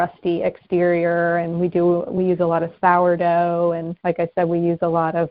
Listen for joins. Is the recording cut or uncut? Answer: uncut